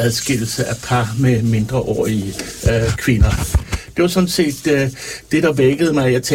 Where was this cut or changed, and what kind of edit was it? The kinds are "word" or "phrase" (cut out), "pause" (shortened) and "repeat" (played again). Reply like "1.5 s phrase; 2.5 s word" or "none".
none